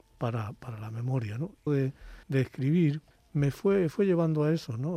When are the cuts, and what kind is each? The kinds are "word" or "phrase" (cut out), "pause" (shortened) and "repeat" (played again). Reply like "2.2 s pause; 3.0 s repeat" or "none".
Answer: 1.7 s phrase; 2.2 s pause; 3.1 s pause